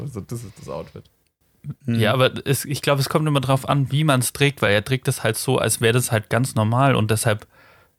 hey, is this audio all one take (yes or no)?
yes